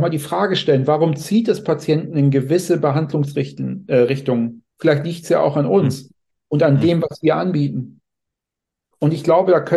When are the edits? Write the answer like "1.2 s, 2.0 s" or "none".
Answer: 4.7 s